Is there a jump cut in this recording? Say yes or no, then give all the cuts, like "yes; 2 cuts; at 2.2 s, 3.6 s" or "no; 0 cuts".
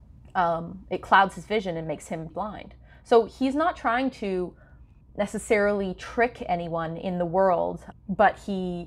yes; 3 cuts; at 2.3 s, 5.0 s, 7.9 s